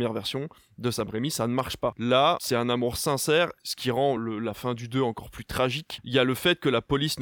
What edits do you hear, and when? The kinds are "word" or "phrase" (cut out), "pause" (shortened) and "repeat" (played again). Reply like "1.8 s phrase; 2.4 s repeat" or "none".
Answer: none